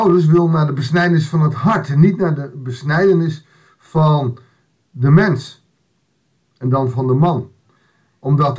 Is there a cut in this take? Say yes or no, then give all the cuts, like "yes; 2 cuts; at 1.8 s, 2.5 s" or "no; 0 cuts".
no; 0 cuts